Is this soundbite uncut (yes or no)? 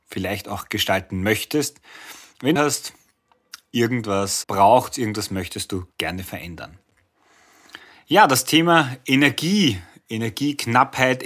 no